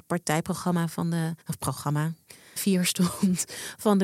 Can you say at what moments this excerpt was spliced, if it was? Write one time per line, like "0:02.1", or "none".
0:01.4
0:02.6